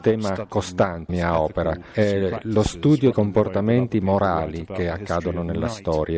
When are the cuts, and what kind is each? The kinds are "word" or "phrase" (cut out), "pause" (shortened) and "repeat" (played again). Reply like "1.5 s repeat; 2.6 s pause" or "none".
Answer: 1.1 s word; 3.1 s word